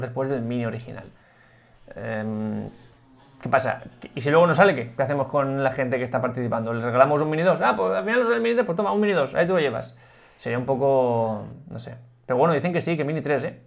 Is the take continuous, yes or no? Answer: yes